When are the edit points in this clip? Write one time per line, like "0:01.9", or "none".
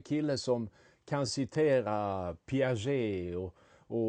none